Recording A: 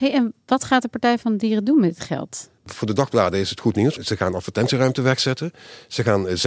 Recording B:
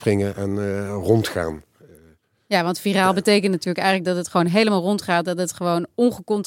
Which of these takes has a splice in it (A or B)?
A